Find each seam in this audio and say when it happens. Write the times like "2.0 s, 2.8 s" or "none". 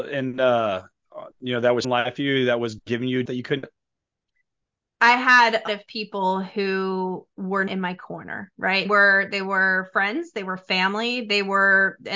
1.8 s, 2.2 s, 3.3 s, 3.6 s, 5.7 s, 7.7 s, 8.9 s